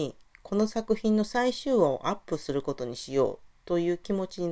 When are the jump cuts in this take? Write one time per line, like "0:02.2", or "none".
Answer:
0:03.5